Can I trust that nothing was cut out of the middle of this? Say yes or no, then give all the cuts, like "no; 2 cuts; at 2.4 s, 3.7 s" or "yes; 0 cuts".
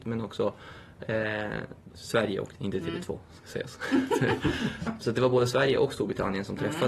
no; 2 cuts; at 2.5 s, 4.9 s